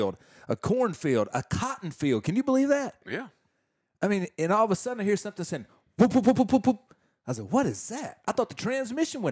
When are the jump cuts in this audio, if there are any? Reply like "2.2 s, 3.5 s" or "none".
6.3 s